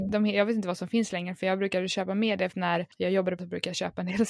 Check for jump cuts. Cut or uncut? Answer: cut